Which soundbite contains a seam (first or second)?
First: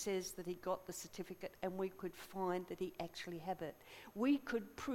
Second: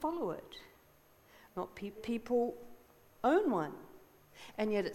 second